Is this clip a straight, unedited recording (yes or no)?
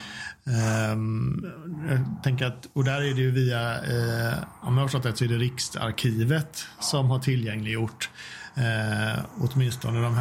yes